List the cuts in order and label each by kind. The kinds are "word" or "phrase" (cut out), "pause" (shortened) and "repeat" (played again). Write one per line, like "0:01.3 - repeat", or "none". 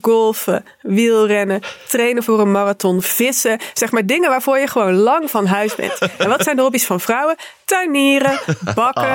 none